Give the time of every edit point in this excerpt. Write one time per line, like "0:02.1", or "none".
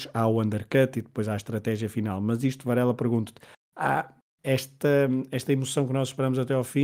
none

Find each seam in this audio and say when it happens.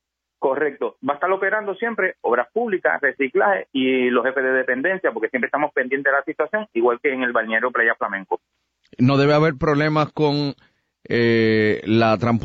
none

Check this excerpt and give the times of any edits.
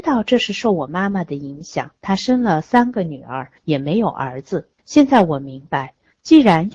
0:02.0
0:04.8

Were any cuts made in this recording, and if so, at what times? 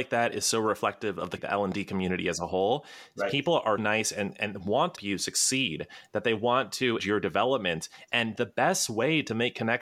0:01.4
0:03.8
0:05.0
0:07.0

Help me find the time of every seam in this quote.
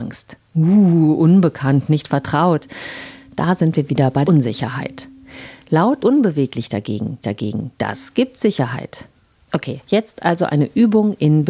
0:04.2
0:06.0
0:07.2
0:09.8

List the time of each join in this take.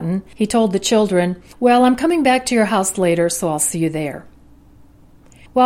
none

